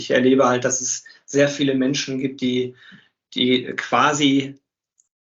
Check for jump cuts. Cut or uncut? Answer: uncut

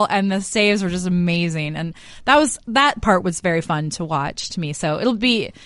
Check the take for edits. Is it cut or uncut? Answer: uncut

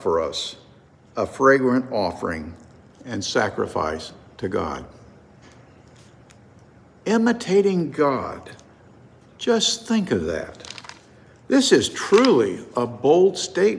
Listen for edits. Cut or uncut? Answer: uncut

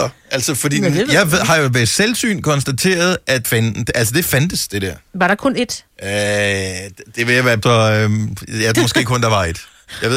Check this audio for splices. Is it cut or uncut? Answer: cut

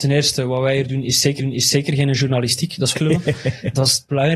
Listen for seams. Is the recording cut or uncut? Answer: cut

